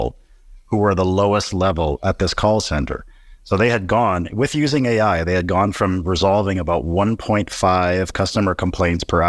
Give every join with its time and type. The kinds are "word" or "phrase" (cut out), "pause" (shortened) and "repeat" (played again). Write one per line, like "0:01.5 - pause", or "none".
none